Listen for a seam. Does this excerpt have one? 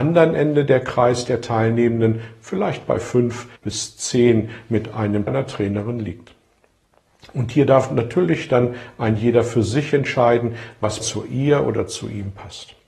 yes; 3 cuts; at 3.6 s, 5.3 s, 11.0 s

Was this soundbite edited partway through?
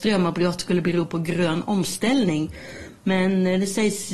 no; 0 cuts

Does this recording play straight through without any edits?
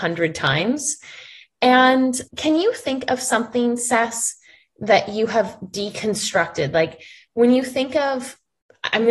no; 1 cut; at 2.3 s

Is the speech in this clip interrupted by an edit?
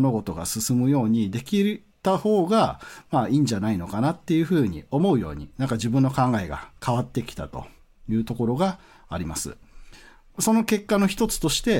no; 0 cuts

